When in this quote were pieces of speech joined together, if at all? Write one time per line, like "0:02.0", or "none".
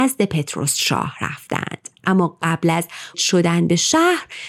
0:02.0
0:03.1